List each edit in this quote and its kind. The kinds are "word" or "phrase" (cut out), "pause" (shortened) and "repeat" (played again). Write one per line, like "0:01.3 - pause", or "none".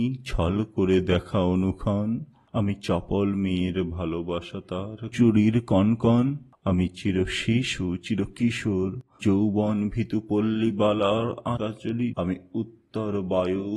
0:05.1 - word
0:09.2 - word
0:11.6 - word
0:12.1 - word